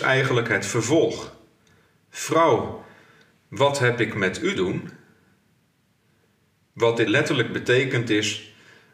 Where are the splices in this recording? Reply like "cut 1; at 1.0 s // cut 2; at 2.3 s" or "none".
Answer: cut 1; at 4.5 s // cut 2; at 7.1 s